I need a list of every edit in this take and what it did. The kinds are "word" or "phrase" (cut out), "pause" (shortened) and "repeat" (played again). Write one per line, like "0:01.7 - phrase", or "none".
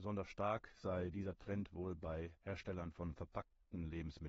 0:02.4 - pause